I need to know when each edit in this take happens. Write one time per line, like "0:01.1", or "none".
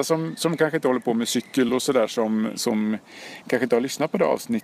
none